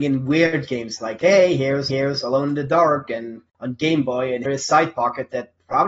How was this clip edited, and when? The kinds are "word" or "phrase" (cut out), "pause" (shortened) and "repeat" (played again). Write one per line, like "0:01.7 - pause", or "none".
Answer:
0:01.9 - repeat
0:03.5 - pause
0:04.5 - word